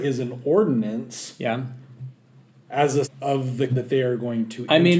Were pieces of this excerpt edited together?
yes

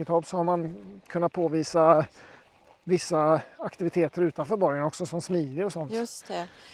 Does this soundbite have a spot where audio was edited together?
no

